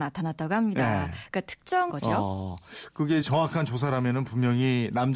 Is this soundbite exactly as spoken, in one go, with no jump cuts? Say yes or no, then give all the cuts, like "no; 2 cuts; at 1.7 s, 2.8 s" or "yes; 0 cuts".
no; 2 cuts; at 1.9 s, 3.2 s